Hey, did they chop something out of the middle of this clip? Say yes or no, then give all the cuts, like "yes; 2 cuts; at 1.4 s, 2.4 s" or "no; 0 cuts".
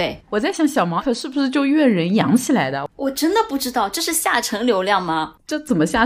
yes; 1 cut; at 1.0 s